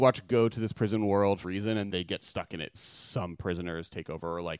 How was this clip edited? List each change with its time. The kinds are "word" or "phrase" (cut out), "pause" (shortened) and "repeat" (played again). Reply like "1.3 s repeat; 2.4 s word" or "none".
1.4 s word; 1.9 s word; 2.7 s word